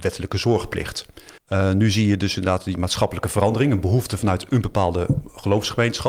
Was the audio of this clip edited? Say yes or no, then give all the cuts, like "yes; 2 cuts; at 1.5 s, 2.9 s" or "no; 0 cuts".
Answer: yes; 1 cut; at 1.4 s